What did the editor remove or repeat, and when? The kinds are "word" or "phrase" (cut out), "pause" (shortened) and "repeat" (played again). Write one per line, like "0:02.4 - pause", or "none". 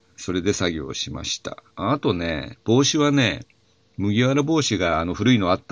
0:01.7 - pause
0:03.6 - pause